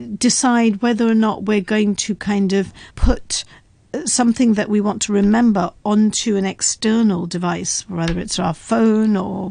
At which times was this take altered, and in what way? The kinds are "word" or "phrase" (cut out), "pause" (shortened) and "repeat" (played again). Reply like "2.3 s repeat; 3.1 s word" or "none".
2.9 s pause